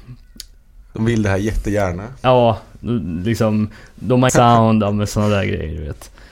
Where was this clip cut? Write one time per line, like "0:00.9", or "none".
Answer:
0:04.3